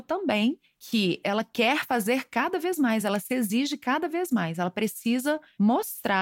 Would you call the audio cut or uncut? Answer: uncut